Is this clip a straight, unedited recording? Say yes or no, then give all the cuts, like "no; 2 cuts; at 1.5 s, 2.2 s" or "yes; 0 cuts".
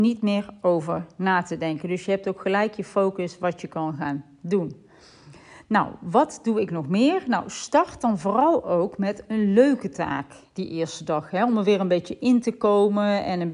yes; 0 cuts